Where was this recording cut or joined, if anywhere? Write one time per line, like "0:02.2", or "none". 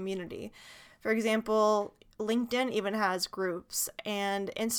none